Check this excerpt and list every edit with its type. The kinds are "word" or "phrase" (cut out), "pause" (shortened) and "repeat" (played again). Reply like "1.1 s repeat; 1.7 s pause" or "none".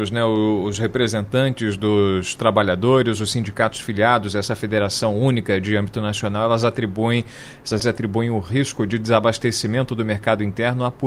7.8 s word